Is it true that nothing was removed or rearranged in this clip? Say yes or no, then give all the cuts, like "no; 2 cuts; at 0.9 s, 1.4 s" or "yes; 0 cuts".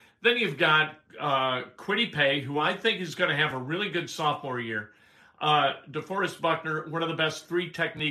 yes; 0 cuts